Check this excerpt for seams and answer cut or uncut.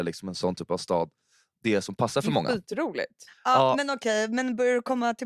uncut